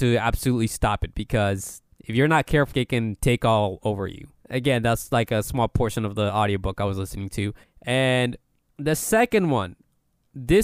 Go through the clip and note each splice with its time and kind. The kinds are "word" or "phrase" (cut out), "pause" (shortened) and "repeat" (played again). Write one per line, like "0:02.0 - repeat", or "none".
0:02.7 - word
0:08.5 - pause